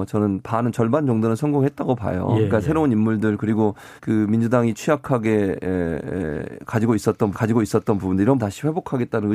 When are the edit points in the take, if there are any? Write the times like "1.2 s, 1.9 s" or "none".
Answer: 4.0 s, 7.3 s, 8.4 s